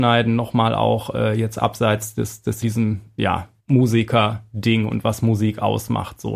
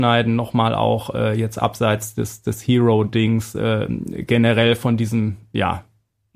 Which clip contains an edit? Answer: first; 2 cuts; at 2.6 s, 3.6 s

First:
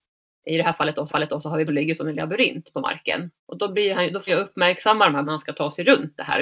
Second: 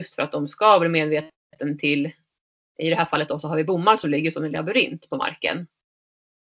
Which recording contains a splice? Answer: first; 5 cuts; at 1.1 s, 1.7 s, 3.4 s, 4.3 s, 5.2 s

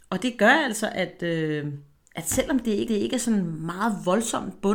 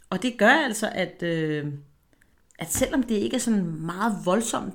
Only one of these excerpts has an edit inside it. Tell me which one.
first; 2 cuts; at 2.0 s, 2.9 s

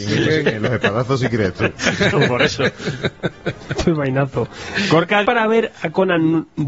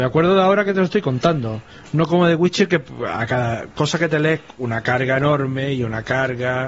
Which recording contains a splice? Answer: first; 1 cut; at 5.2 s

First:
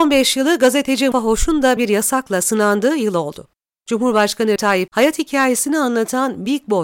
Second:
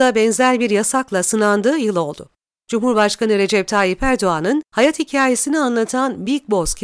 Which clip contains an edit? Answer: first; 4 cuts; at 1.1 s, 1.8 s, 4.6 s, 4.9 s

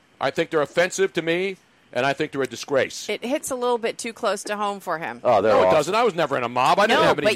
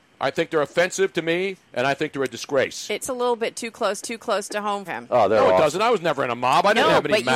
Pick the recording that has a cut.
second; 4 cuts; at 1.6 s, 3.0 s, 4.0 s, 4.9 s

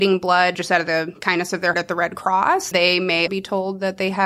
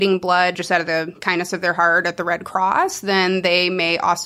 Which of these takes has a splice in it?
first; 3 cuts; at 1.7 s, 2.7 s, 3.3 s

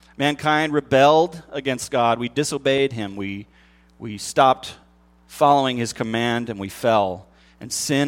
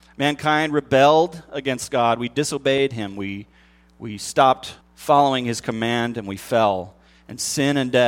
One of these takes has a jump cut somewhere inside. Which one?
second; 1 cut; at 4.8 s

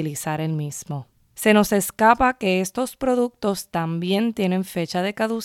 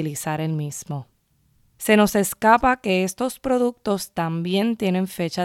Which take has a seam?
first; 1 cut; at 1.1 s

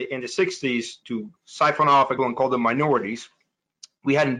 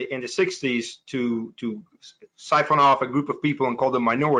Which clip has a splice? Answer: first; 3 cuts; at 1.0 s, 1.4 s, 2.2 s

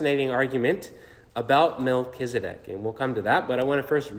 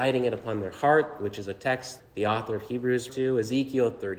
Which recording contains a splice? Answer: second; 2 cuts; at 2.0 s, 3.1 s

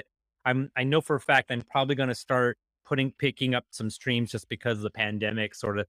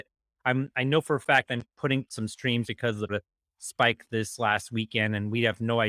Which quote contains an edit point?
second; 4 cuts; at 1.6 s, 2.0 s, 2.7 s, 3.1 s

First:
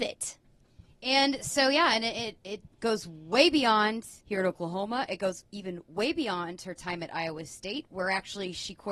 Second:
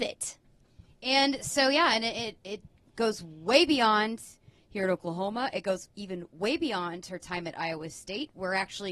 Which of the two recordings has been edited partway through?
first; 2 cuts; at 2.7 s, 4.2 s

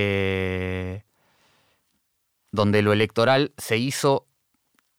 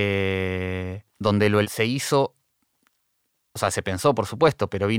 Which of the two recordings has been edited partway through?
second; 2 cuts; at 1.1 s, 1.6 s

